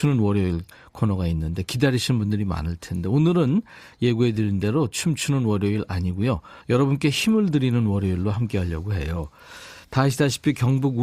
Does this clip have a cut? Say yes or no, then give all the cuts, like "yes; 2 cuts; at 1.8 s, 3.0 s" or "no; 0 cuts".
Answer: yes; 1 cut; at 6.6 s